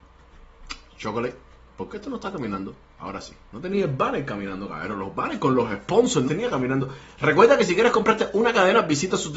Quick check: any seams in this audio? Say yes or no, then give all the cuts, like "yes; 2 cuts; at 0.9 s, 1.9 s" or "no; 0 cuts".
yes; 1 cut; at 6.3 s